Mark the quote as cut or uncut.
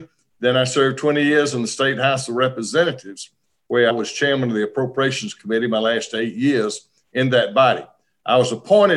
cut